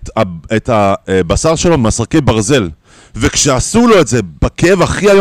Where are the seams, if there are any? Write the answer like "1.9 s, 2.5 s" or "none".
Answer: none